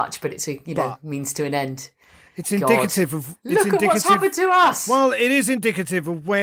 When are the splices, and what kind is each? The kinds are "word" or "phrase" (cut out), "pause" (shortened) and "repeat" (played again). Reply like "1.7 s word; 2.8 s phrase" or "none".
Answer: none